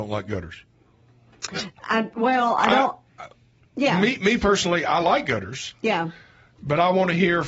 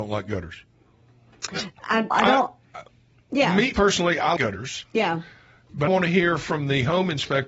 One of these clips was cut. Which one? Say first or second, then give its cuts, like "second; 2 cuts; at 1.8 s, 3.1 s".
second; 4 cuts; at 2.1 s, 3.7 s, 4.4 s, 5.9 s